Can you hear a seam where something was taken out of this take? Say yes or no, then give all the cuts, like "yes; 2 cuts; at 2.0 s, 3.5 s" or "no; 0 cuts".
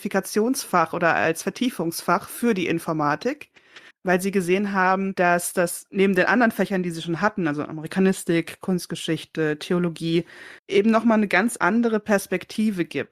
yes; 2 cuts; at 3.9 s, 10.6 s